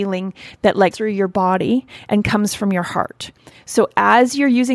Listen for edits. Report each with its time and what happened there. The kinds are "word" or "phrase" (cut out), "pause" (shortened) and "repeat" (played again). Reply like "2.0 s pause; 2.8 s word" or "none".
0.9 s word